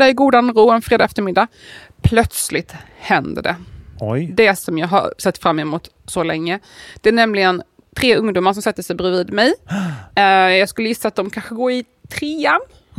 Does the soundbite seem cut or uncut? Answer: uncut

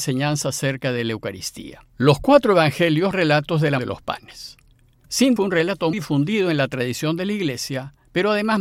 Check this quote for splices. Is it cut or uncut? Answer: cut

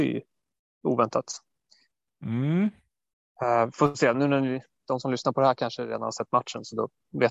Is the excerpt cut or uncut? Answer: uncut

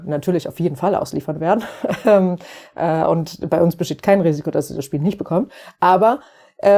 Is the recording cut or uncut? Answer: uncut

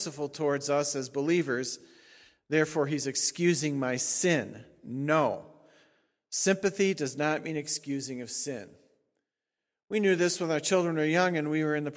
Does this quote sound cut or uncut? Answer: uncut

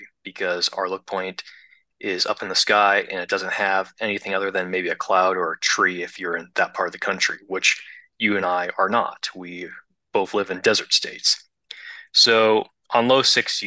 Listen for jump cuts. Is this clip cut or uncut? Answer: uncut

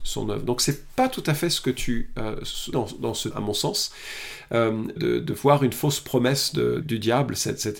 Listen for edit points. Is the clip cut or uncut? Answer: cut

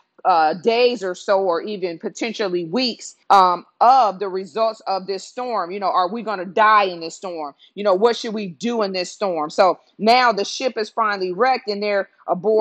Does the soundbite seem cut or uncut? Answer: cut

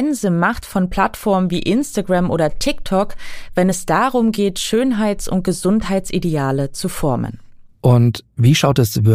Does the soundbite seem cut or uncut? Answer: uncut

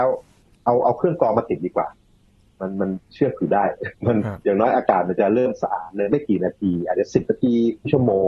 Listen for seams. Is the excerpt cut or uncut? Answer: uncut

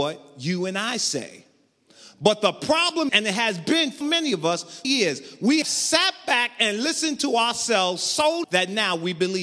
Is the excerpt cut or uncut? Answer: cut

